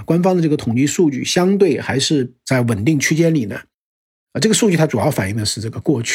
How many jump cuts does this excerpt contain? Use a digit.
0